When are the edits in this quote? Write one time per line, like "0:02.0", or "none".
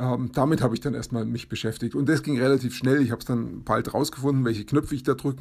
none